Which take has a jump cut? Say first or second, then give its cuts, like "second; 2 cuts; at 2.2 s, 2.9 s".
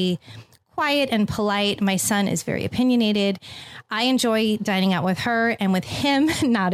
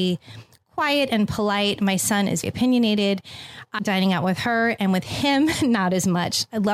second; 2 cuts; at 2.4 s, 3.8 s